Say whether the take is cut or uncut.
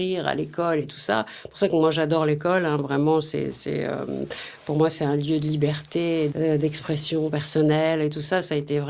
uncut